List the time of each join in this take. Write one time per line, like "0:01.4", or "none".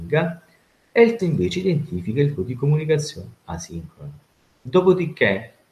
0:01.2
0:02.4